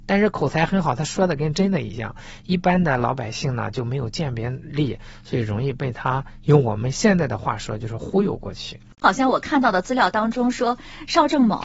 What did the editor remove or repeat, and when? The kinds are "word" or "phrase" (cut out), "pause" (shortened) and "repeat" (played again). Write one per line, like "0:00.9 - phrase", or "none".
none